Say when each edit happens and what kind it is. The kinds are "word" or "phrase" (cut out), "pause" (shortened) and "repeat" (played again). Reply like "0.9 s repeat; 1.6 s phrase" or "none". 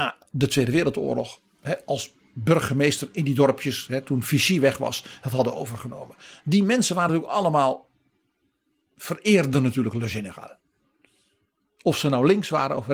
none